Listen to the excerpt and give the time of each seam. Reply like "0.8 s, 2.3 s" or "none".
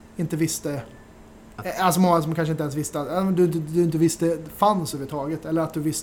none